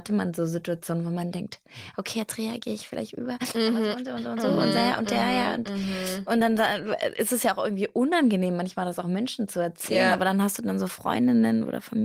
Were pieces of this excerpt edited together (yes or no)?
no